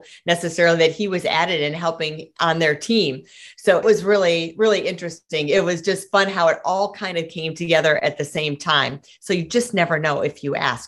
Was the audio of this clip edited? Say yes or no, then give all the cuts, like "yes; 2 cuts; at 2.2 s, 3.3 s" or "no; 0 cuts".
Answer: yes; 1 cut; at 3.8 s